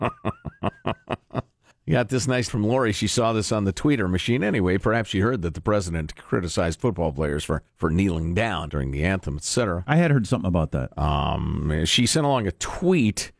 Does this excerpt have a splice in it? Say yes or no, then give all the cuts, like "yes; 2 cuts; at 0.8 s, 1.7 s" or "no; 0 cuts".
yes; 4 cuts; at 1.7 s, 2.5 s, 7.7 s, 8.7 s